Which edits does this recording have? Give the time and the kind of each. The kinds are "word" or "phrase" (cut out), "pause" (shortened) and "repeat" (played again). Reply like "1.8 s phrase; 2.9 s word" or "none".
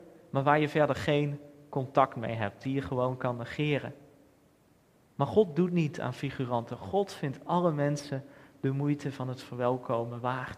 none